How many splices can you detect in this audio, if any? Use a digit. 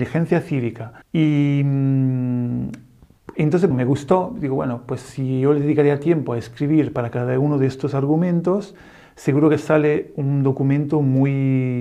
2